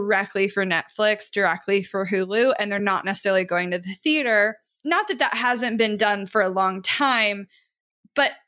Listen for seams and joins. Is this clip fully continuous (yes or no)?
yes